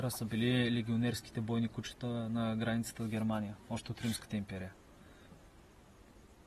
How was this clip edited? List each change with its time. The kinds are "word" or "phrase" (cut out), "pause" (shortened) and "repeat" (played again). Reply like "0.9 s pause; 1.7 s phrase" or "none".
3.6 s pause